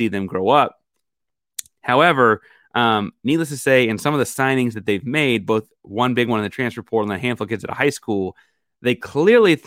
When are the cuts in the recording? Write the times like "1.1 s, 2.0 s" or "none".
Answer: none